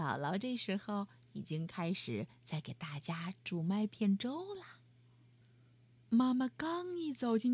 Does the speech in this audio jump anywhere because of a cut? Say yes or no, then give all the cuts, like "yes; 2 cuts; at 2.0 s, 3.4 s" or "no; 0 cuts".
no; 0 cuts